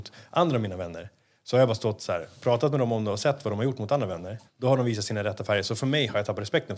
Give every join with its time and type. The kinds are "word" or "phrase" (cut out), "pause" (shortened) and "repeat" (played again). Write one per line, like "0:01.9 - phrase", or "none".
0:04.5 - pause